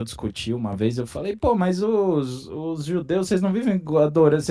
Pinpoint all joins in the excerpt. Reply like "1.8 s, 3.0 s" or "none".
none